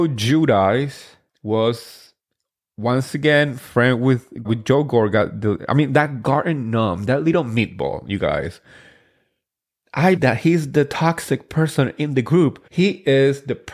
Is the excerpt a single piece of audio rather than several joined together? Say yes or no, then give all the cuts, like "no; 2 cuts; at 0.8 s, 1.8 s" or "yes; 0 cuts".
no; 4 cuts; at 1.3 s, 4.4 s, 10.2 s, 12.7 s